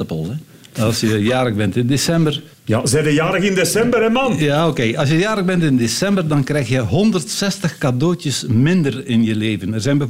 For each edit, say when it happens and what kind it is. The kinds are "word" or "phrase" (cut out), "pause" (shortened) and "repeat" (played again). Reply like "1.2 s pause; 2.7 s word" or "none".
2.5 s pause